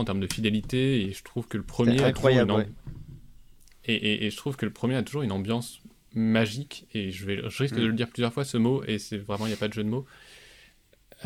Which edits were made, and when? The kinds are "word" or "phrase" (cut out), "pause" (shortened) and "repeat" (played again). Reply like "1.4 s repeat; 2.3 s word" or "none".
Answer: none